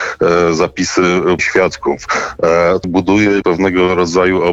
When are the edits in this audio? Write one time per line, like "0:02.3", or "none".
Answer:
0:01.4
0:02.8
0:03.4